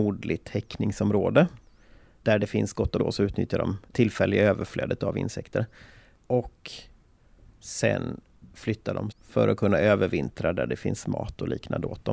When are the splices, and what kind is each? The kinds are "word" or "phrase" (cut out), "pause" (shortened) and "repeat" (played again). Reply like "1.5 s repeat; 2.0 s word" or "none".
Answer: 3.0 s phrase; 9.1 s word

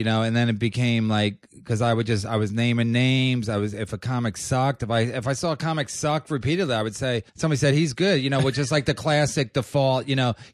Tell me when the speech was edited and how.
7.3 s pause

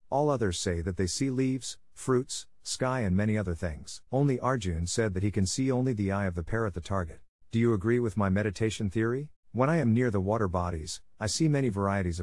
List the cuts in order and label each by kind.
4.1 s pause; 7.4 s pause; 9.4 s pause

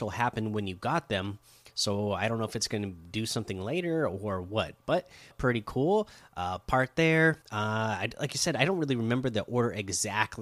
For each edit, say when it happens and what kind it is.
5.3 s word; 7.4 s pause

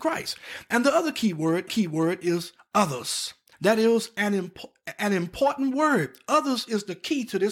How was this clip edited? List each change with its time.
1.7 s repeat; 3.5 s pause

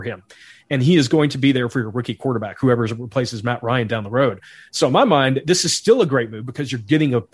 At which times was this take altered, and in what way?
none

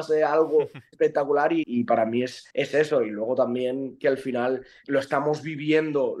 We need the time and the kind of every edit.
0.9 s word; 1.6 s word; 2.5 s pause; 4.8 s word

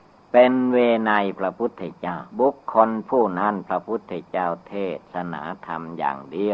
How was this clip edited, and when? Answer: 2.3 s pause

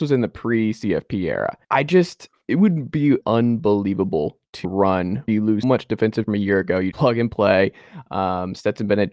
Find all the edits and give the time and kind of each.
1.6 s pause; 2.4 s word; 3.2 s word; 4.6 s word; 5.3 s word; 5.6 s word; 6.3 s phrase; 6.9 s word

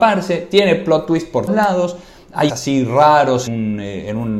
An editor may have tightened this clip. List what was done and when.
1.5 s word; 2.5 s word; 3.5 s word

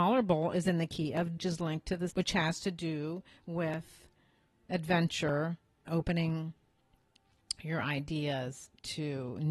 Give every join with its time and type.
1.4 s phrase; 2.1 s phrase; 5.9 s word

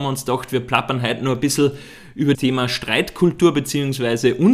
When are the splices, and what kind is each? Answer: 2.3 s word

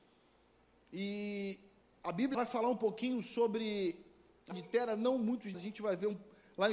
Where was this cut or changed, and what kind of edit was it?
2.3 s word; 4.5 s word; 5.5 s word

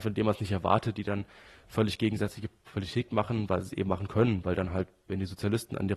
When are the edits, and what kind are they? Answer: none

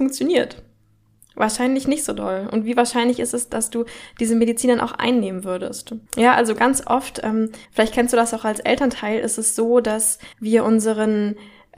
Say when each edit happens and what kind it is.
6.1 s pause; 7.6 s pause; 10.3 s pause

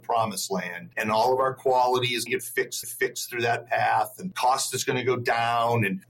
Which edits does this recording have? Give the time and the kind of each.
2.3 s word; 2.8 s repeat

